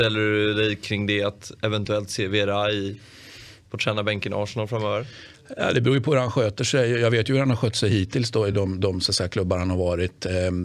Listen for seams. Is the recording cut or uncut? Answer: uncut